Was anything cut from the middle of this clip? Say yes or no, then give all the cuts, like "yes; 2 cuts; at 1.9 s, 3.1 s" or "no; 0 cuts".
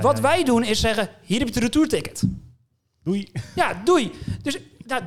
no; 0 cuts